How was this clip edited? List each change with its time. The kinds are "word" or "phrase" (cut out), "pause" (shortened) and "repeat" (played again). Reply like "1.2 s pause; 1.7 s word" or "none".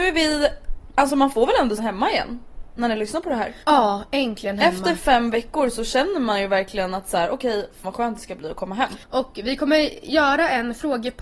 1.8 s phrase; 3.6 s pause; 7.8 s word; 9.0 s pause